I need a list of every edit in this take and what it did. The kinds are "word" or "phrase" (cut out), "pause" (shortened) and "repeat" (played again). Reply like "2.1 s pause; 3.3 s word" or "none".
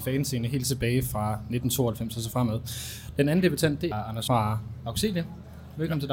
3.9 s word; 4.3 s word